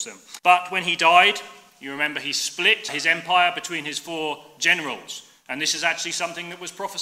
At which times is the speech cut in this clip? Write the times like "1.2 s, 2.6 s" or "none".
none